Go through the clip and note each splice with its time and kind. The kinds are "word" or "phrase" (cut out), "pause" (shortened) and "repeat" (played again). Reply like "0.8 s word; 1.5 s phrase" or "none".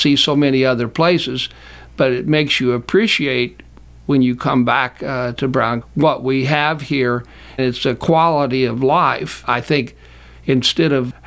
5.8 s word; 7.6 s word